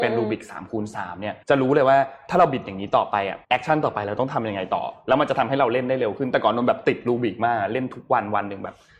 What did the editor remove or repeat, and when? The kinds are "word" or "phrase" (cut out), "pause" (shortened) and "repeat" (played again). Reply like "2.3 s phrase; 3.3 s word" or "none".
1.4 s pause; 3.4 s pause